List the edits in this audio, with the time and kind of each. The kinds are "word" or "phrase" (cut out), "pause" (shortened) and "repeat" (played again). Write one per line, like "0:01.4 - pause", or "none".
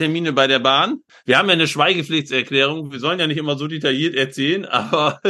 none